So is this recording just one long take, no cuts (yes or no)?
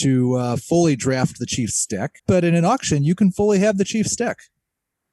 no